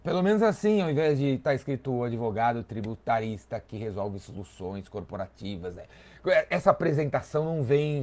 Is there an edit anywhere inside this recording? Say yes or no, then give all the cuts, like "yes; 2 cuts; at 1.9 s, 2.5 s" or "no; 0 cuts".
no; 0 cuts